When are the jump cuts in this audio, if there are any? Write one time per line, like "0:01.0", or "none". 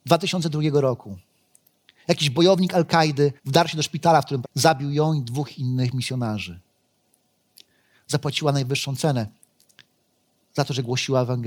0:03.4
0:04.4